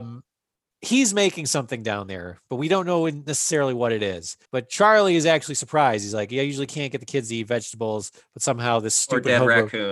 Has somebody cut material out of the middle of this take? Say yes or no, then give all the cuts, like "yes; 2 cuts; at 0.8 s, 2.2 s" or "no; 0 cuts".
yes; 1 cut; at 4.4 s